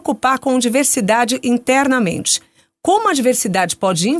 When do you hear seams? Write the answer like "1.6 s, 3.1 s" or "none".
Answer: none